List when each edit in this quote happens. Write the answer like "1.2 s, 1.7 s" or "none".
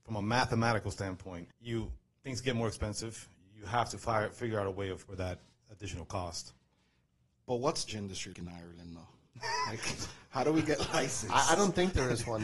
1.5 s, 5.1 s, 7.9 s, 8.3 s